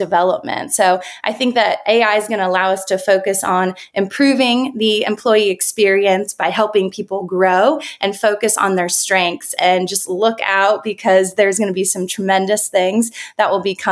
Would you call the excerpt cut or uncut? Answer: uncut